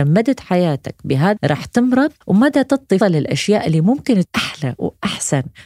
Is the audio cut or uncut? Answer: cut